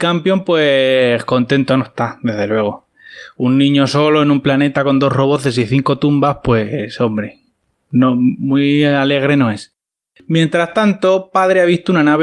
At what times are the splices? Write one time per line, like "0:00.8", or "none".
none